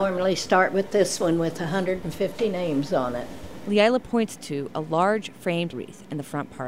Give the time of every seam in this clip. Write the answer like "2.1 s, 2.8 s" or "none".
5.7 s